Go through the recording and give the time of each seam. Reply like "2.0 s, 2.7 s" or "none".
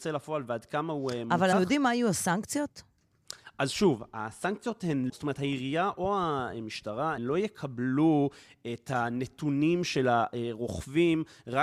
1.5 s, 5.1 s, 7.2 s